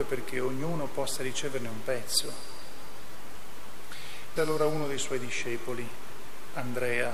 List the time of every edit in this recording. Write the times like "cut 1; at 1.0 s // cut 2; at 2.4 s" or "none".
cut 1; at 4.4 s